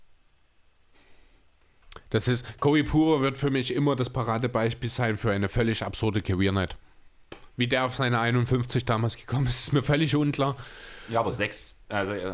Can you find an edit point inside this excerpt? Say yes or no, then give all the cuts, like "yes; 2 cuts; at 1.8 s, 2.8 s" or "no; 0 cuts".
no; 0 cuts